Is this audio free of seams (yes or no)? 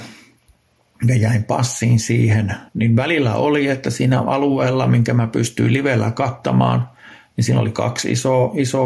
no